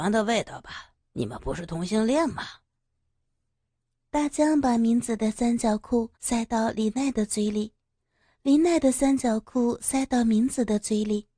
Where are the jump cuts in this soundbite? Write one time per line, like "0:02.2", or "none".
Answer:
0:01.0
0:06.2